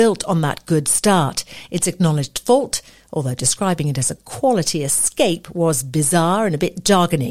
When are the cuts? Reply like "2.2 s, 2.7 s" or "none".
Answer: none